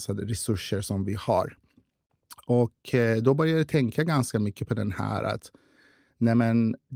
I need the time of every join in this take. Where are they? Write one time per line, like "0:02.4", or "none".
none